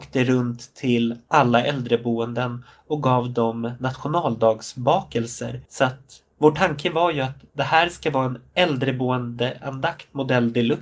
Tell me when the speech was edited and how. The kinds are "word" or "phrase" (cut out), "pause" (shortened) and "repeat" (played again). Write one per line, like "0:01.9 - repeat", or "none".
0:05.7 - pause
0:06.3 - pause